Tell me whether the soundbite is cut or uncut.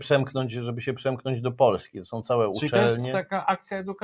uncut